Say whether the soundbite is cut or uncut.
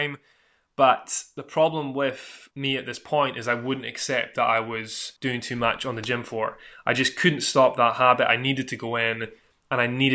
cut